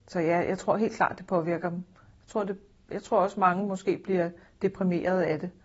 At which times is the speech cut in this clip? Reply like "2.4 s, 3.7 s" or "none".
none